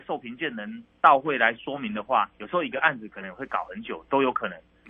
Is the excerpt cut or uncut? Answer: cut